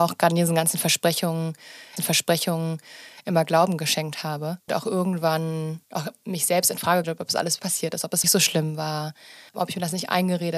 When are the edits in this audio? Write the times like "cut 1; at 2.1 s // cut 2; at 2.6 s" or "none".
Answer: cut 1; at 2.0 s // cut 2; at 4.7 s // cut 3; at 5.8 s // cut 4; at 7.0 s // cut 5; at 7.6 s // cut 6; at 8.2 s // cut 7; at 9.5 s